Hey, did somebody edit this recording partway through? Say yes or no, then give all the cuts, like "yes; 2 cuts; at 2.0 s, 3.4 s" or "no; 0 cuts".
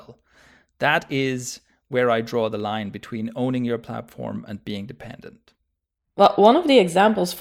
no; 0 cuts